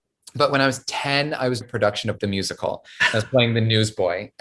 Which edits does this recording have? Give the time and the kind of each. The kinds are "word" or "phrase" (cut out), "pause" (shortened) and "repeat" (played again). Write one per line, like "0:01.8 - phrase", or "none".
0:01.6 - word
0:02.2 - word